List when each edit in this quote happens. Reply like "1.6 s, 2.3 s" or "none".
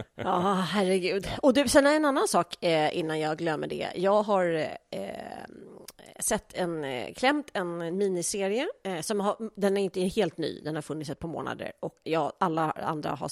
12.0 s

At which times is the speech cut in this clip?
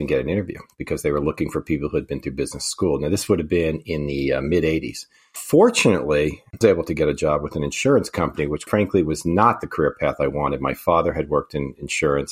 6.6 s, 8.7 s

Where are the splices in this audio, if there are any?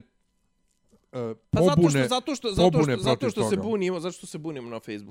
1.4 s

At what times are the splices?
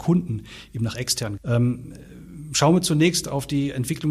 1.4 s

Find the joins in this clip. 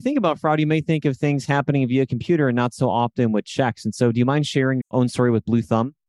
4.8 s

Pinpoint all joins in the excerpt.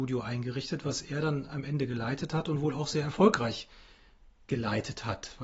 none

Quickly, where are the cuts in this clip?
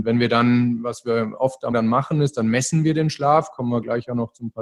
1.7 s

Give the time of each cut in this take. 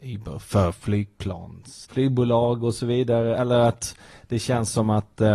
1.9 s

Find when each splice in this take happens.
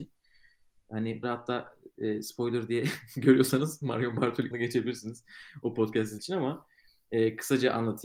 1.2 s, 4.5 s, 6.2 s

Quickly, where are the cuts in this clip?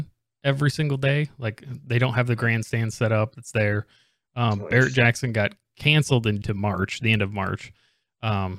6.4 s

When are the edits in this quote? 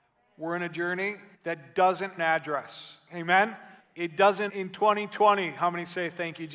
1.3 s, 2.2 s, 3.8 s, 4.5 s

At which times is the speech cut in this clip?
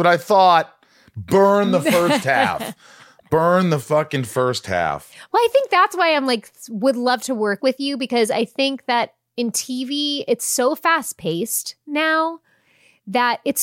none

